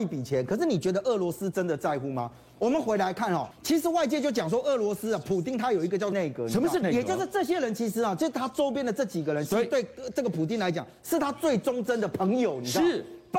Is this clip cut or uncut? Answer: cut